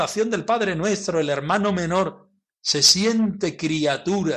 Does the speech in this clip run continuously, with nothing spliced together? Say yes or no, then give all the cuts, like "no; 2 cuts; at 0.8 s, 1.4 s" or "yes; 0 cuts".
yes; 0 cuts